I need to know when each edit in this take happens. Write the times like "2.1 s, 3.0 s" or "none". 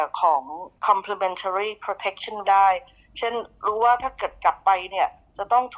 2.4 s